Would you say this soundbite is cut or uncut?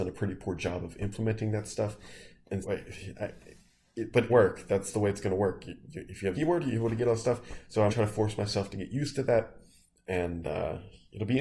cut